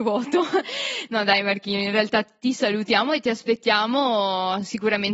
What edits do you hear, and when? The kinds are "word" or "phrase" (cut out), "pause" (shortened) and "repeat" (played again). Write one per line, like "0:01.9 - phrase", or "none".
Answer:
none